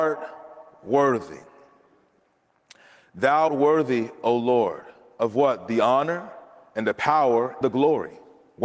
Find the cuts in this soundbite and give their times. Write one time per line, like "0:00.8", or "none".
0:03.5
0:07.6

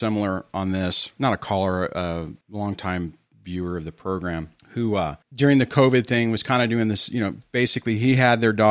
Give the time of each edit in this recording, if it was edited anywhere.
0:02.4
0:04.6
0:05.2

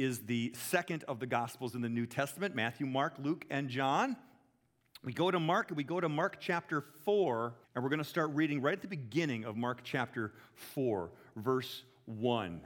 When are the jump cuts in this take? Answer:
0:07.6

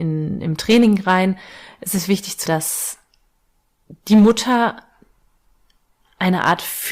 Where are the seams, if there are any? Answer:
0:02.5

